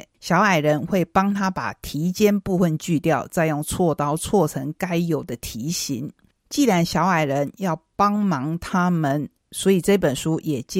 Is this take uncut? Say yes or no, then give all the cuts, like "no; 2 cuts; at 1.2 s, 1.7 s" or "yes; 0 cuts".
yes; 0 cuts